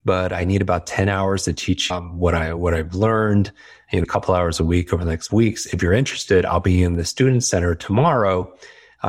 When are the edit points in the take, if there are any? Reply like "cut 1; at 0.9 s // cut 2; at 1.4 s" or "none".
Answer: cut 1; at 1.9 s // cut 2; at 4.0 s // cut 3; at 5.3 s